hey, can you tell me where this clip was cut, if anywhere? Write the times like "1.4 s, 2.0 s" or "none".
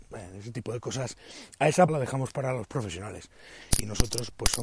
1.9 s